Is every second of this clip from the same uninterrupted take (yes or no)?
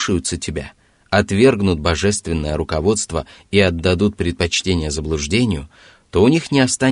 yes